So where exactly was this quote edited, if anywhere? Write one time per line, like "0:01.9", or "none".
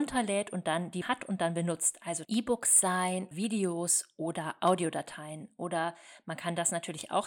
0:01.0
0:02.2
0:03.3